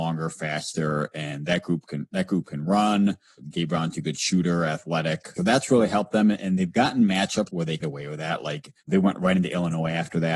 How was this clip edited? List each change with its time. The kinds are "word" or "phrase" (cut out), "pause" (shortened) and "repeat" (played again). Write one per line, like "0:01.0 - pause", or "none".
0:05.4 - word
0:07.5 - phrase
0:07.8 - word
0:08.8 - pause